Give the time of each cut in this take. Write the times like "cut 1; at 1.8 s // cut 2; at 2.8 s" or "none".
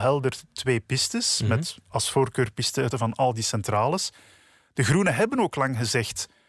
cut 1; at 1.8 s // cut 2; at 2.9 s